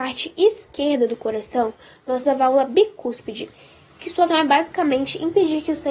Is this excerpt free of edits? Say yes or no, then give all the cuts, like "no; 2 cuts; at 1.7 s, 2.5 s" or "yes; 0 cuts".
no; 2 cuts; at 2.2 s, 4.3 s